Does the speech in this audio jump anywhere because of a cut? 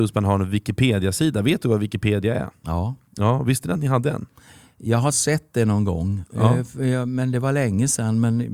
no; 0 cuts

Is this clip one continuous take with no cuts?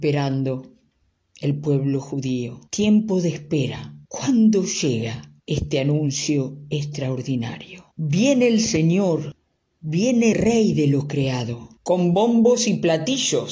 no; 6 cuts; at 2.7 s, 4.0 s, 5.4 s, 7.9 s, 10.3 s, 11.8 s

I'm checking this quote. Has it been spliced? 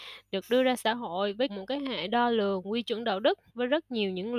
yes; 2 cuts; at 1.5 s, 3.5 s

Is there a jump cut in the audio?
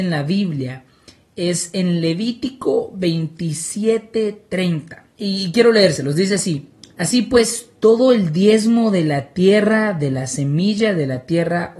yes; 1 cut; at 5.1 s

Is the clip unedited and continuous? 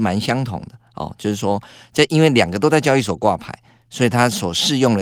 yes; 0 cuts

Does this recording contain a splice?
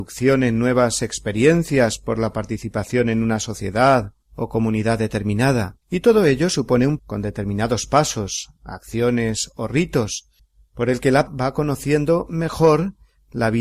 yes; 5 cuts; at 4.2 s, 5.8 s, 7.0 s, 10.4 s, 11.3 s

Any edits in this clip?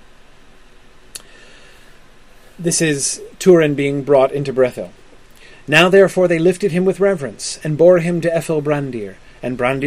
no; 0 cuts

